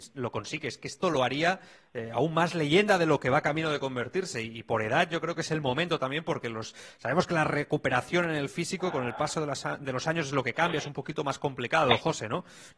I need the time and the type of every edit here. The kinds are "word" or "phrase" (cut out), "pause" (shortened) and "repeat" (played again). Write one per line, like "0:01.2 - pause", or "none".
none